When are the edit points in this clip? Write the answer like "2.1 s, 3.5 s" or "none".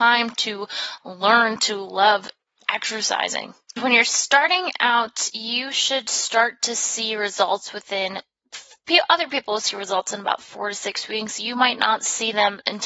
none